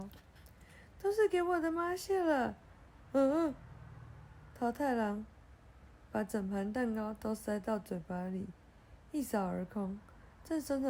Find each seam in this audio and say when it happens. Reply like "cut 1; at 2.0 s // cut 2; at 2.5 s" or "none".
none